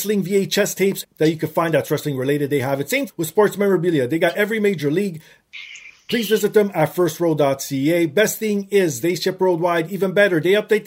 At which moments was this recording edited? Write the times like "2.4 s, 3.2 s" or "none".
1.0 s, 3.1 s